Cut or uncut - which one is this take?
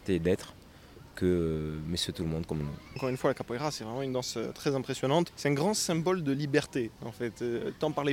uncut